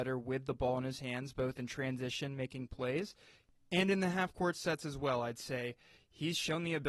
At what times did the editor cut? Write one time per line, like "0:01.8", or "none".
none